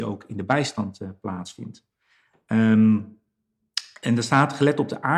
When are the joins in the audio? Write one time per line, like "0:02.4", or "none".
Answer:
none